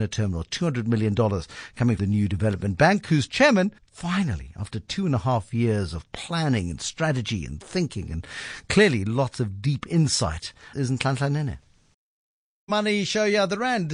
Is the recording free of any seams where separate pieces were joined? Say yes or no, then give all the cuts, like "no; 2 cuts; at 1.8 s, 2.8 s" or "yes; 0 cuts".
no; 4 cuts; at 2.0 s, 3.8 s, 10.7 s, 11.9 s